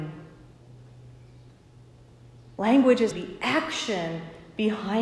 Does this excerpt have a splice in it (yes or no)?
yes